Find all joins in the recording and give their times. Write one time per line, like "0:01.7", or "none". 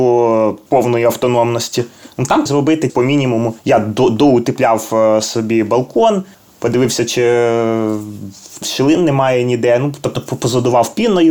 0:02.5
0:02.9
0:03.6
0:06.3
0:08.6